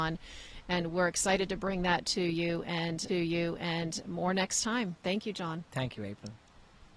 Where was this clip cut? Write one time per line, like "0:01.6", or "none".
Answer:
0:03.1